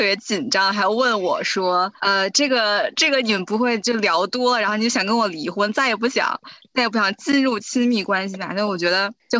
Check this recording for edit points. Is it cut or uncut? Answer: cut